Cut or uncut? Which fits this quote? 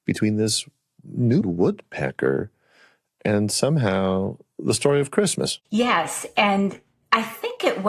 cut